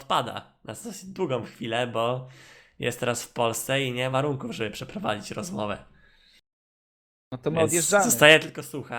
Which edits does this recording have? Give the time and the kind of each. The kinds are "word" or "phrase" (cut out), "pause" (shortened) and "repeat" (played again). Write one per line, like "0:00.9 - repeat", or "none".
0:04.1 - phrase